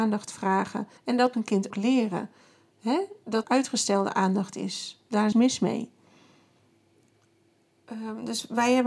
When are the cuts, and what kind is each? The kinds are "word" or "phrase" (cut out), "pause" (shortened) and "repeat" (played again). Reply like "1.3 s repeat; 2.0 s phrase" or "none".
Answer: 1.0 s pause; 1.3 s word; 1.7 s word; 3.4 s word; 5.3 s word

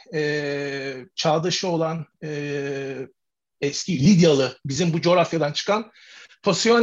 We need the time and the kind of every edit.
none

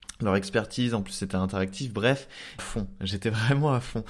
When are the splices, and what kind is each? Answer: 2.6 s phrase

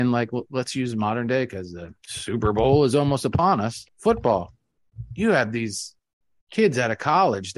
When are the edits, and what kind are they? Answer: 3.9 s pause

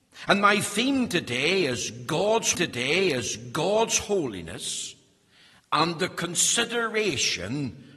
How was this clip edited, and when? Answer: 2.5 s repeat

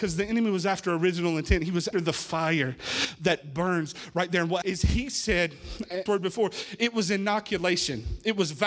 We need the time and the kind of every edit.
1.9 s word; 4.6 s word; 6.1 s phrase

